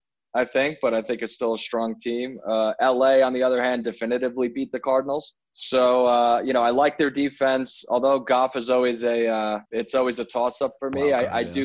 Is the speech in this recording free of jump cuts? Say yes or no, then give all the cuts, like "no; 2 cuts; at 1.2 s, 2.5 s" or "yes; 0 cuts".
no; 2 cuts; at 5.4 s, 9.7 s